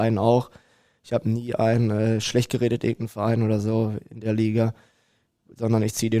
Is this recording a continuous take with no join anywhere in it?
yes; 0 cuts

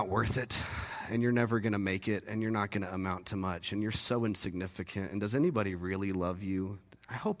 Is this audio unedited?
yes; 0 cuts

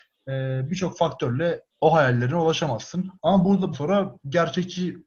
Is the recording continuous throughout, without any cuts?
no; 3 cuts; at 1.7 s, 3.2 s, 3.7 s

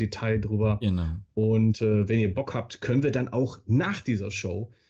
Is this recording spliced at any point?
no; 0 cuts

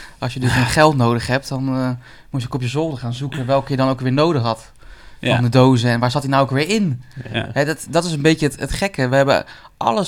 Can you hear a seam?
no; 0 cuts

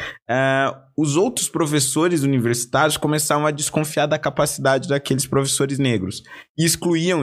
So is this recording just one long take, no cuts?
yes; 0 cuts

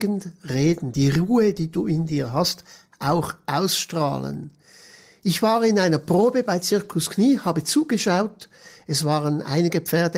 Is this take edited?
no; 0 cuts

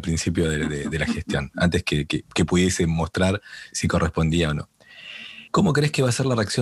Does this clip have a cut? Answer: yes; 1 cut; at 5.5 s

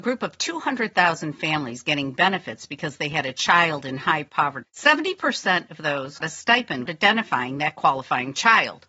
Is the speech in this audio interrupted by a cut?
yes; 3 cuts; at 4.6 s, 6.2 s, 6.9 s

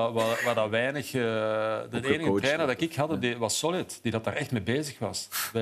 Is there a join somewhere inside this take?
no; 0 cuts

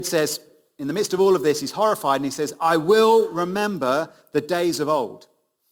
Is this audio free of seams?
yes; 0 cuts

